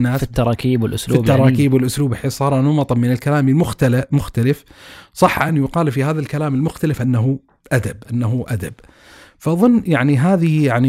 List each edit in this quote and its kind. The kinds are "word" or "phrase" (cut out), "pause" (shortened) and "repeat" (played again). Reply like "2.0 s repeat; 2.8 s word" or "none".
none